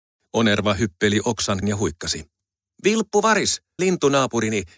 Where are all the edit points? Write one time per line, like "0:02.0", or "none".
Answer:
0:01.6
0:03.8